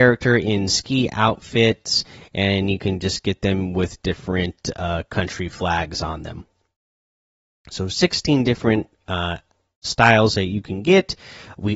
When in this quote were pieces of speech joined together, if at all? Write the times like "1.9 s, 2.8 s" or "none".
none